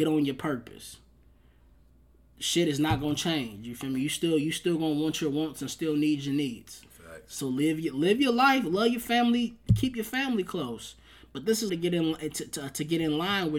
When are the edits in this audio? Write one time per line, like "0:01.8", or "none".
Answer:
0:11.7